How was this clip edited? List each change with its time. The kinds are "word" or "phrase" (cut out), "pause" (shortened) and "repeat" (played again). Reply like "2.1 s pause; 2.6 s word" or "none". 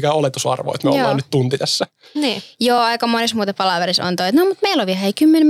none